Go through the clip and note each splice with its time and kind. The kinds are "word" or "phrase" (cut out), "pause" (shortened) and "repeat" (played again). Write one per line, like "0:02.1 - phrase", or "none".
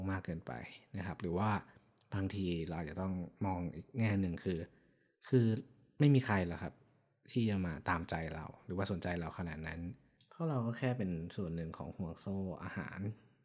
none